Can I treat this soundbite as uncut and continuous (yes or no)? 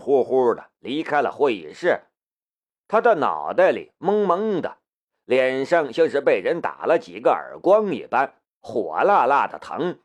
yes